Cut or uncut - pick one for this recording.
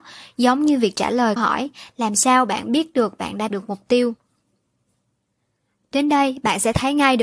cut